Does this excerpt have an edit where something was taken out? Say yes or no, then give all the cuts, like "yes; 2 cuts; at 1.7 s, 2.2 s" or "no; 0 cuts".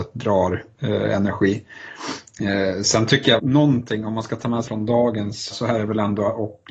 yes; 3 cuts; at 3.4 s, 4.7 s, 5.5 s